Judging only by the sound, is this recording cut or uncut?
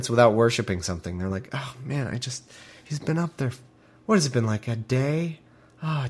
uncut